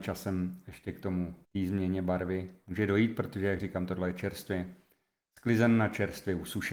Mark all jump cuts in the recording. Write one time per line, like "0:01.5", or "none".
0:01.4